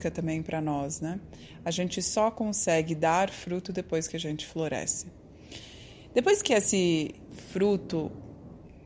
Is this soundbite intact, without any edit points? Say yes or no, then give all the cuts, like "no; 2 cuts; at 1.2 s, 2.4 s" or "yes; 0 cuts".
yes; 0 cuts